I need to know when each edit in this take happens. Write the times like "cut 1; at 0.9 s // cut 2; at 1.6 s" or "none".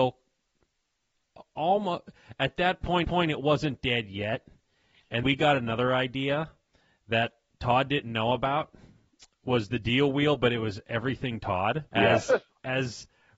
cut 1; at 3.0 s // cut 2; at 5.2 s // cut 3; at 11.9 s